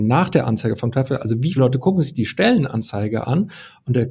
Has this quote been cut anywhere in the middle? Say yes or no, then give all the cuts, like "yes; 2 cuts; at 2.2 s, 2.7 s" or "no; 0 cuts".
yes; 1 cut; at 1.6 s